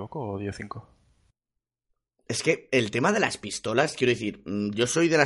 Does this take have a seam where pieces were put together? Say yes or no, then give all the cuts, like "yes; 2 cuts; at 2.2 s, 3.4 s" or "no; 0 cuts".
no; 0 cuts